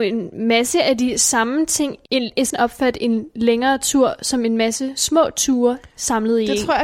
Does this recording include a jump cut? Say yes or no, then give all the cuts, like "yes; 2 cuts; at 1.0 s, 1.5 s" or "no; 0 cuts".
yes; 1 cut; at 2.5 s